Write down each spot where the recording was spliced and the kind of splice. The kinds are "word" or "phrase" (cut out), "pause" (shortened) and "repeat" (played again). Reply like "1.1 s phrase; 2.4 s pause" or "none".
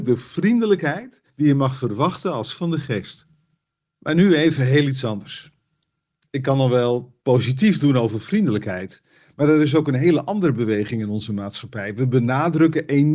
1.3 s pause; 2.6 s word; 7.2 s pause